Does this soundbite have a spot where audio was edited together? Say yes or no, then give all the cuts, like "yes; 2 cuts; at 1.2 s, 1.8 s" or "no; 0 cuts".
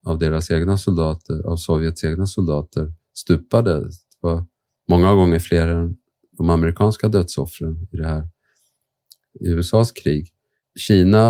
no; 0 cuts